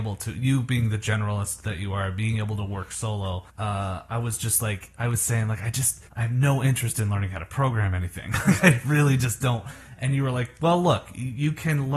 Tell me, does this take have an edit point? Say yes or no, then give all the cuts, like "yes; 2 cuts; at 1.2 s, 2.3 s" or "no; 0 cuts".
yes; 2 cuts; at 3.5 s, 6.1 s